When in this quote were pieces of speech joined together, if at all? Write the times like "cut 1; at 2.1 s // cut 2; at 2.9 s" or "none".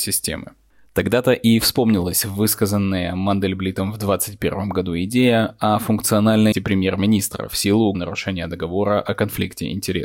cut 1; at 6.5 s // cut 2; at 7.9 s